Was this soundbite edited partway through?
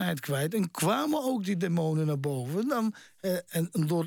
no; 0 cuts

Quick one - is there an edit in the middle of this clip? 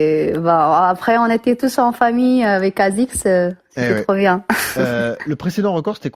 no; 0 cuts

